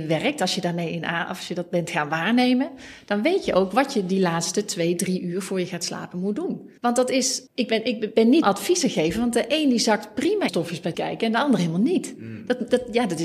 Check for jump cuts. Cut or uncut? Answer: cut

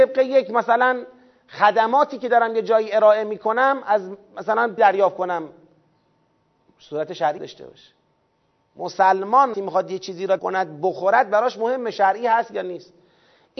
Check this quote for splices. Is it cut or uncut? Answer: cut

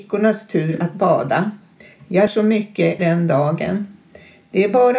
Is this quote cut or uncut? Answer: cut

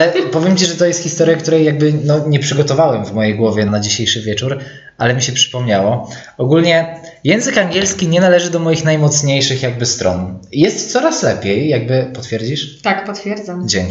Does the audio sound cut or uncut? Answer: cut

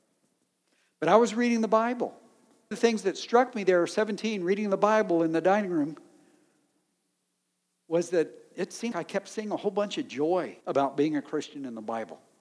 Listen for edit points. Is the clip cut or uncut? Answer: cut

